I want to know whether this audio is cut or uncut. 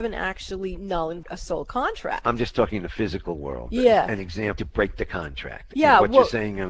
cut